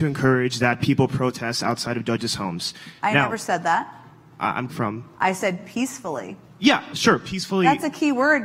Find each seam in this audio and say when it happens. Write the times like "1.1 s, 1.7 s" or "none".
4.7 s